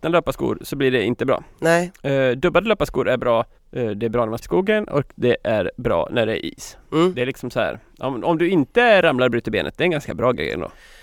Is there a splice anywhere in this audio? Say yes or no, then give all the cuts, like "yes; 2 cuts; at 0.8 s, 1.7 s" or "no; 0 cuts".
yes; 2 cuts; at 3.6 s, 4.4 s